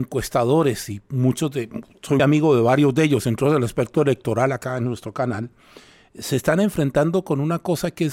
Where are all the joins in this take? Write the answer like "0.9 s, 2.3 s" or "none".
2.2 s